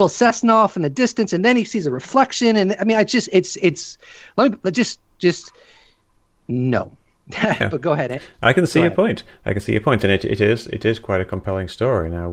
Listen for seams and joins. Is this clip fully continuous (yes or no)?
yes